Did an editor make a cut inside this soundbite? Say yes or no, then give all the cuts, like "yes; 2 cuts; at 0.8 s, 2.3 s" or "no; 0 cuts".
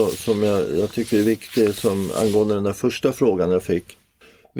no; 0 cuts